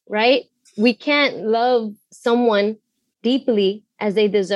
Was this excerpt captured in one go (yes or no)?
yes